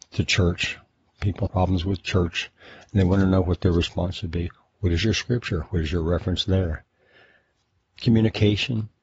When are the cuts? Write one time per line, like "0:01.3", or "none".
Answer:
0:01.5